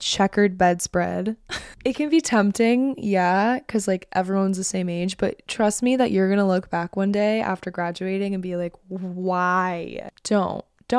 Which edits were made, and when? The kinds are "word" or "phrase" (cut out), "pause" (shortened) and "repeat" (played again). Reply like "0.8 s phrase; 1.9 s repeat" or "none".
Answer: none